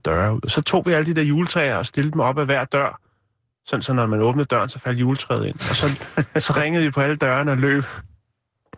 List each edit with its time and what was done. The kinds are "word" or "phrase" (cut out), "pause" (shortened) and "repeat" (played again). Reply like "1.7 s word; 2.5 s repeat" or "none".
none